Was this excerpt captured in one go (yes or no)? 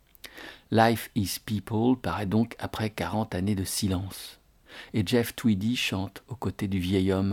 yes